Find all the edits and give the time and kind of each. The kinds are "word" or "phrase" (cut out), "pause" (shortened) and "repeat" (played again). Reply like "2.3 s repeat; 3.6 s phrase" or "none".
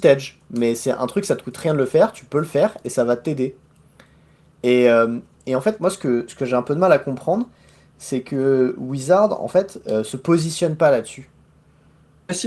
none